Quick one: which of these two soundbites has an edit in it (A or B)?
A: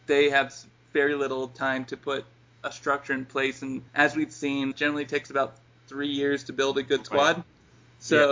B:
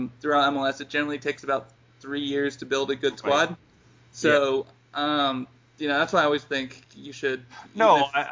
A